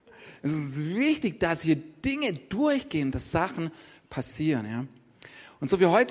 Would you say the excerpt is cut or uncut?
uncut